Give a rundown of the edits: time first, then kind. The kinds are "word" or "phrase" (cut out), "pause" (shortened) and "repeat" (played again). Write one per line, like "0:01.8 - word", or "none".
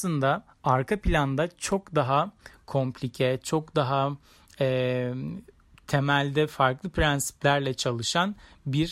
none